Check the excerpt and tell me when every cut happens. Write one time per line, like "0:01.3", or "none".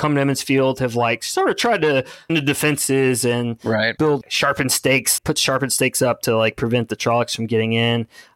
0:02.3